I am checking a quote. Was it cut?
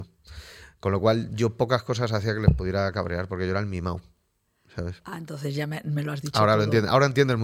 no; 0 cuts

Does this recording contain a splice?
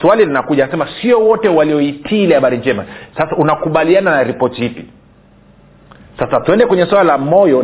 no; 0 cuts

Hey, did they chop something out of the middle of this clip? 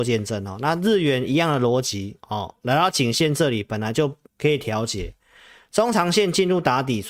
yes; 2 cuts; at 2.2 s, 4.3 s

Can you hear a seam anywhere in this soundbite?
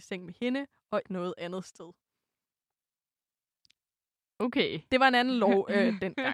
yes; 1 cut; at 1.1 s

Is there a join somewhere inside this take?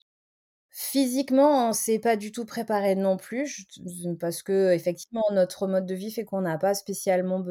no; 0 cuts

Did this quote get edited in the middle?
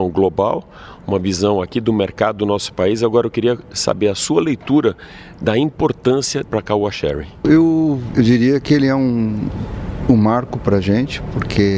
yes; 1 cut; at 6.5 s

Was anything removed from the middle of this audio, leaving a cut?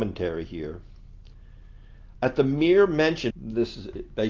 yes; 2 cuts; at 2.1 s, 3.3 s

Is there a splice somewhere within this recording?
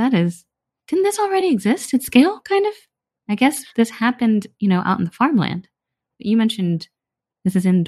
no; 0 cuts

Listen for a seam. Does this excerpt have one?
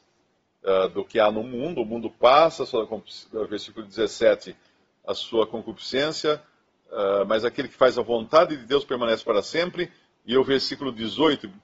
no; 0 cuts

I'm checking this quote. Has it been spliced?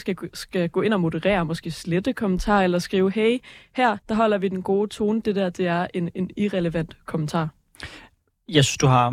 yes; 1 cut; at 4.0 s

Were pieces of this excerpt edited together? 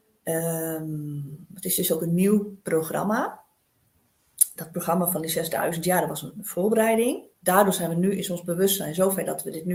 yes; 1 cut; at 7.3 s

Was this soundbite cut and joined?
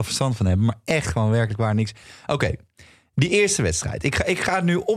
no; 0 cuts

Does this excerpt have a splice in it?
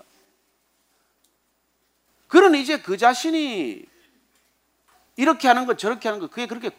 no; 0 cuts

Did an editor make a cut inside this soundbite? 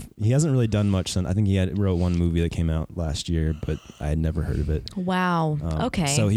no; 0 cuts

